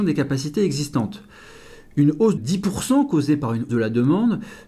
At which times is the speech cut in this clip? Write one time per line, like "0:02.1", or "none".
0:02.4
0:03.7